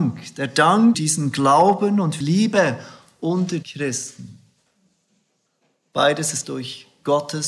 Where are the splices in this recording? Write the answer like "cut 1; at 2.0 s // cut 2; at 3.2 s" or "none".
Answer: cut 1; at 0.9 s // cut 2; at 2.2 s // cut 3; at 3.6 s // cut 4; at 6.4 s